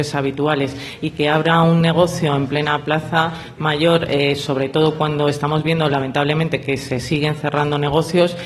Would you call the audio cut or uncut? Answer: uncut